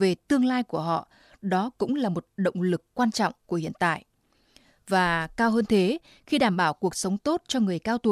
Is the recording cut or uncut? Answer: uncut